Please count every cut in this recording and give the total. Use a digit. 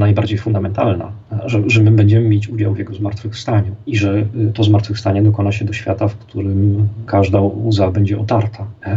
0